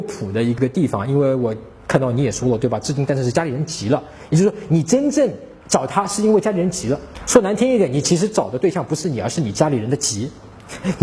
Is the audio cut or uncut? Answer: cut